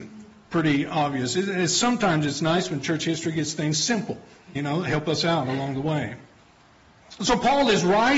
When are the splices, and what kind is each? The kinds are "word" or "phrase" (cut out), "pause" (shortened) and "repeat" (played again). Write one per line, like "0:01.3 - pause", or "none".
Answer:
0:04.6 - word